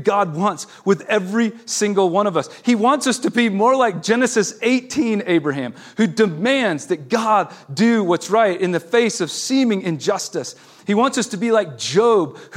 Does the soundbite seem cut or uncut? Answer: uncut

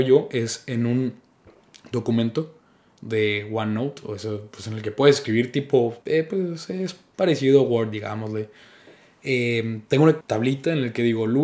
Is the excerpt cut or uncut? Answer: cut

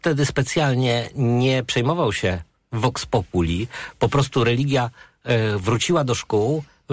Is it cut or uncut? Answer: uncut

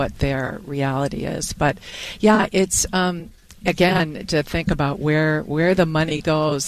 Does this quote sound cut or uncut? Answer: uncut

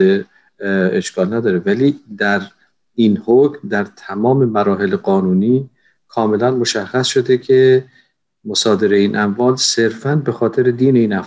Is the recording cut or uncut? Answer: uncut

